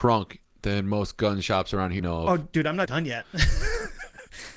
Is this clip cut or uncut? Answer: cut